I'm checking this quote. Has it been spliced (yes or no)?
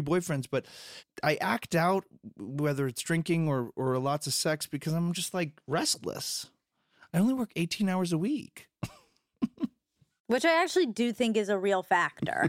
no